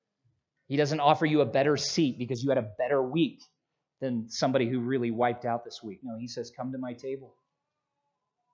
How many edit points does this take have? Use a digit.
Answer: 0